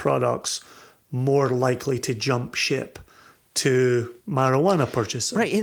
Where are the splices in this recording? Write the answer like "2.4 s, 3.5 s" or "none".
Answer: 4.2 s